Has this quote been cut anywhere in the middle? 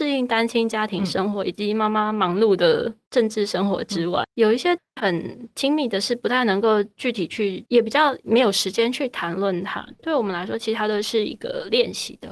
yes; 1 cut; at 4.2 s

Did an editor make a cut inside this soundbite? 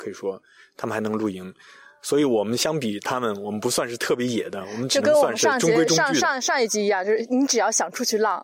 no; 0 cuts

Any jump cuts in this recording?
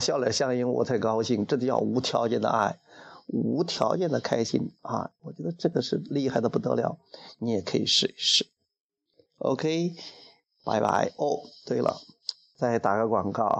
no; 0 cuts

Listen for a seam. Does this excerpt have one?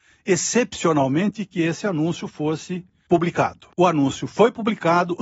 yes; 1 cut; at 3.7 s

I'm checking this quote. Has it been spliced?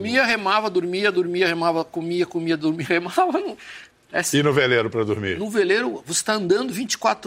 no; 0 cuts

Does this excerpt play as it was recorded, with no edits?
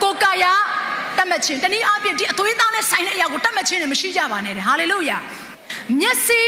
yes; 0 cuts

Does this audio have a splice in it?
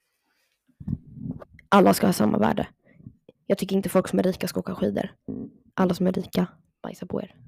no; 0 cuts

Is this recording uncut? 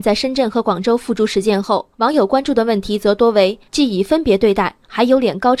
no; 2 cuts; at 1.9 s, 3.7 s

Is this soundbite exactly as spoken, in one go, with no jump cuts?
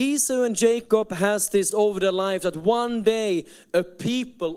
no; 1 cut; at 1.7 s

